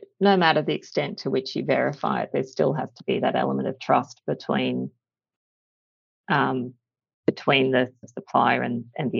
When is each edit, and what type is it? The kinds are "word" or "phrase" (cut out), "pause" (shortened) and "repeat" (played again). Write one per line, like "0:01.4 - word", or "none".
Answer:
0:08.0 - word